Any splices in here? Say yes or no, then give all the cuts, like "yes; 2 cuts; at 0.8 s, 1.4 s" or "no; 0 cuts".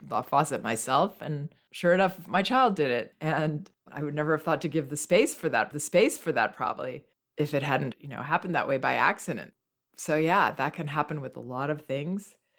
yes; 3 cuts; at 3.8 s, 5.7 s, 7.9 s